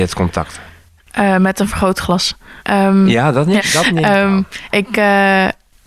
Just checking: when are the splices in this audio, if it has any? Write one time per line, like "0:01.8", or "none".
0:02.6
0:03.6
0:04.7